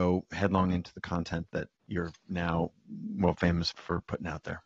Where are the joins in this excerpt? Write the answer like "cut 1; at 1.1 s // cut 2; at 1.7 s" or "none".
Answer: cut 1; at 1.8 s // cut 2; at 3.7 s